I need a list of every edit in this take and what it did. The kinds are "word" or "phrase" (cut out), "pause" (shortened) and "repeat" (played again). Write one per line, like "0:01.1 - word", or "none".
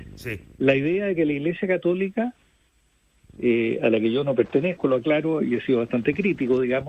none